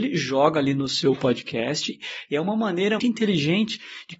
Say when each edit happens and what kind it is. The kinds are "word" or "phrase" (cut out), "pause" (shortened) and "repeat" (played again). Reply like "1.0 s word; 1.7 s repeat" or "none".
3.0 s word